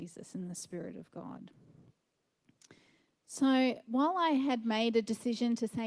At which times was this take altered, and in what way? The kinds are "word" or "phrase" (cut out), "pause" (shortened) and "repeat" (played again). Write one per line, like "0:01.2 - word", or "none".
none